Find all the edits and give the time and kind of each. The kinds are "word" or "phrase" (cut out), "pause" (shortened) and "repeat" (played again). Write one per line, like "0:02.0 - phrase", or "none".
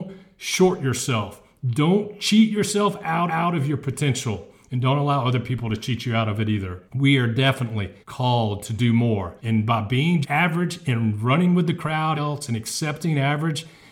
0:03.3 - repeat
0:06.9 - pause
0:08.0 - pause
0:09.4 - pause
0:10.2 - word
0:12.1 - phrase